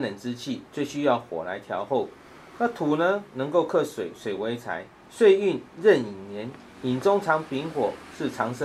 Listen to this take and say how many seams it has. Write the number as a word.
one